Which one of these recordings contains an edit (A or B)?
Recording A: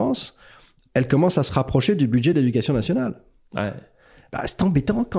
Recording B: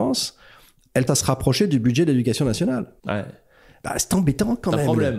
B